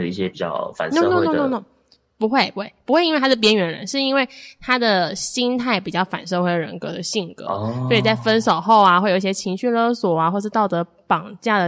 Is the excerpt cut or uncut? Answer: uncut